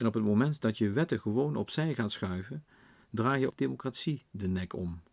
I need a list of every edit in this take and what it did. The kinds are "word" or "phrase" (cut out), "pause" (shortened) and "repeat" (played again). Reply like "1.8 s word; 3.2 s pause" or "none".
3.5 s word